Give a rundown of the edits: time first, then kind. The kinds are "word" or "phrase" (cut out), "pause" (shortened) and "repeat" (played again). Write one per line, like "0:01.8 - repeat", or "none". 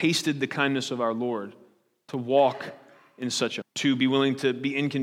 0:03.6 - word